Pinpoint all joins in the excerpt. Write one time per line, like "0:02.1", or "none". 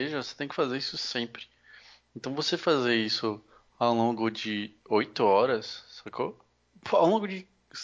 none